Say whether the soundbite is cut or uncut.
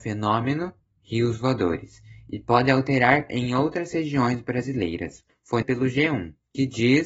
cut